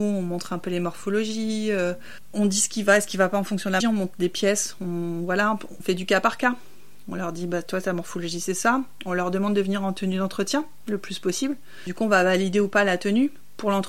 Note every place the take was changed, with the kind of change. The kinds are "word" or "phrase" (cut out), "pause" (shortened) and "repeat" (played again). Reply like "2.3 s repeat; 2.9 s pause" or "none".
3.8 s word; 5.8 s word